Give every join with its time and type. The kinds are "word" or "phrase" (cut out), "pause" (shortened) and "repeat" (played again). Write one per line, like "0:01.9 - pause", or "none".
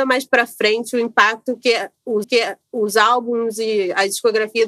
0:02.2 - repeat